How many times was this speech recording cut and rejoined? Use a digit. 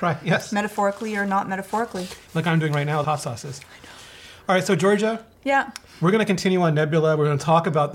1